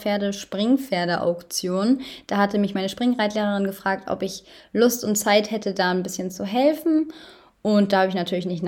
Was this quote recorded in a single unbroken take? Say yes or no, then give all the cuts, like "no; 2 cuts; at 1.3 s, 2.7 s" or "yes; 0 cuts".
yes; 0 cuts